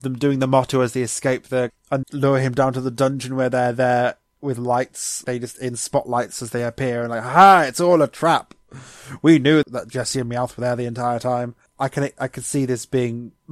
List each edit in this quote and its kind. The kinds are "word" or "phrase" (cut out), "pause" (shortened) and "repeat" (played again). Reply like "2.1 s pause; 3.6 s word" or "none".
1.7 s word; 2.0 s word; 5.2 s word